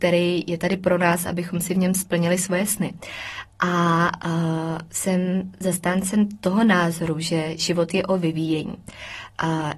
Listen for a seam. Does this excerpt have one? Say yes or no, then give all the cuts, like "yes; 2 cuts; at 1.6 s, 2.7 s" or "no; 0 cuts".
no; 0 cuts